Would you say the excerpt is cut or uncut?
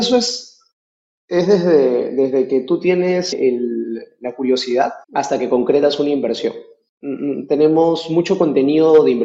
cut